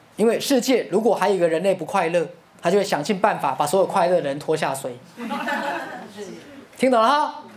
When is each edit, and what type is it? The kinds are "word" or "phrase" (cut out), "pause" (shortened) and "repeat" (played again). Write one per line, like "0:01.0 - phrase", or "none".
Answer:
0:02.5 - pause
0:06.7 - pause